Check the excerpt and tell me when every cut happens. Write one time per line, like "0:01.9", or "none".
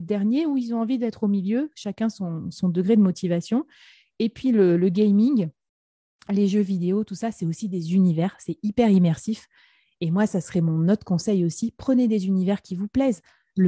none